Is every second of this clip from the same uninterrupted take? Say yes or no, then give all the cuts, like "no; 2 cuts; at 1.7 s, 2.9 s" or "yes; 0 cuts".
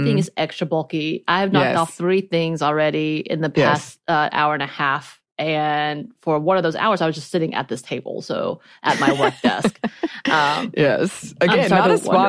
yes; 0 cuts